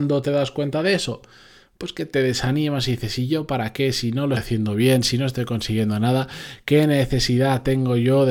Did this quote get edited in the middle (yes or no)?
yes